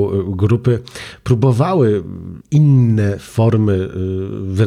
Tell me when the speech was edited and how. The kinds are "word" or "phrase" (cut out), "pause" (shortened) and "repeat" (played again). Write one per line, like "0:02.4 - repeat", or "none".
0:02.4 - pause